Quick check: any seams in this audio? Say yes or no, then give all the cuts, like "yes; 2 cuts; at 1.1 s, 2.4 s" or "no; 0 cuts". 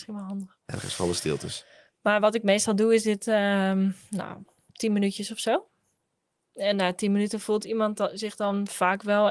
no; 0 cuts